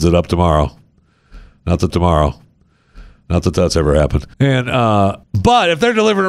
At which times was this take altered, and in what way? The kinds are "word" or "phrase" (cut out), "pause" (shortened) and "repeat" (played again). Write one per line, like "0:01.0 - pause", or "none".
0:01.9 - repeat
0:04.3 - pause
0:05.2 - pause